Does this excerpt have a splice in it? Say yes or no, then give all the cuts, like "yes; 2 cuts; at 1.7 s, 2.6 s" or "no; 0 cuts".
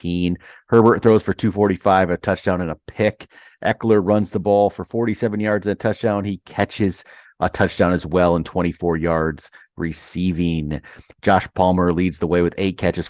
no; 0 cuts